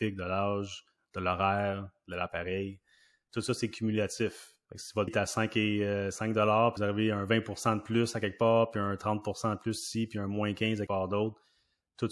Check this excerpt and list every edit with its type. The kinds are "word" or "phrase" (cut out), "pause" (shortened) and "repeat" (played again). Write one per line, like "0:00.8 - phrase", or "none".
0:04.6 - pause
0:05.1 - word
0:06.8 - word
0:10.9 - word